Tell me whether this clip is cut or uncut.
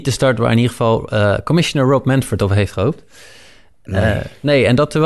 uncut